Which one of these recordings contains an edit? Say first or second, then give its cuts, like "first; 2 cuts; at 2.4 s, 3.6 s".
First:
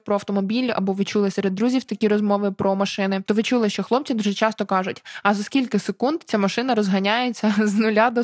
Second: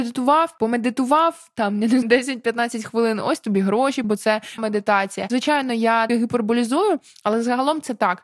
second; 4 cuts; at 2.0 s, 4.0 s, 4.6 s, 6.1 s